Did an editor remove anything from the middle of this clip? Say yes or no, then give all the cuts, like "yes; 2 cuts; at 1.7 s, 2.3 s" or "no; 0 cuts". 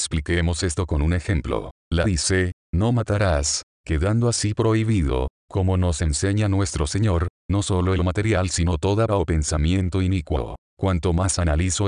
yes; 3 cuts; at 2.0 s, 8.0 s, 9.1 s